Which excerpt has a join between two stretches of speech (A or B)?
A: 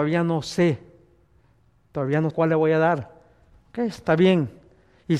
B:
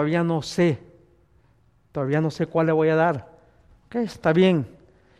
A